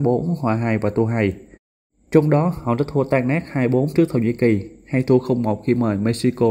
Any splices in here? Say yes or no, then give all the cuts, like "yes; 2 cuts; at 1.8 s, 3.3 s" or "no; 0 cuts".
no; 0 cuts